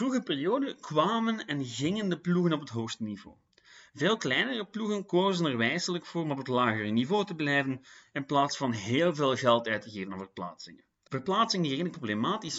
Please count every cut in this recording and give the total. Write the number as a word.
zero